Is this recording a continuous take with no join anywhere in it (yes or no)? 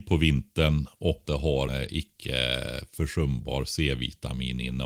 no